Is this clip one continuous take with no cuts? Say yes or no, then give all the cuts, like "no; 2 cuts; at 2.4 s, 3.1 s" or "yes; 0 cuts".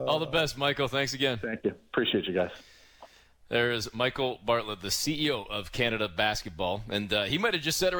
yes; 0 cuts